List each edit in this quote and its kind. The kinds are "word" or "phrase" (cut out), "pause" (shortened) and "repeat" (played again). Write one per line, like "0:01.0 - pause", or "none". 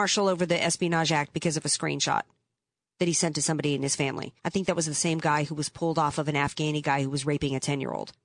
0:04.4 - pause